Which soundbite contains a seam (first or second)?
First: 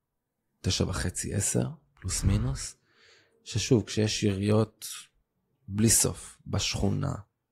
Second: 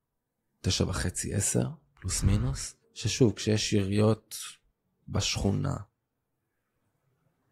second